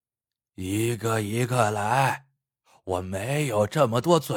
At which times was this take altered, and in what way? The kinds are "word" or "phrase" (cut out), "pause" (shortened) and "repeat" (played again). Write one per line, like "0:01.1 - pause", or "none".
none

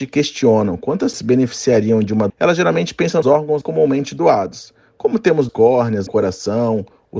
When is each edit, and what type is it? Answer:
0:01.1 - word
0:02.3 - word
0:03.2 - word
0:03.6 - word
0:05.5 - word
0:06.1 - word

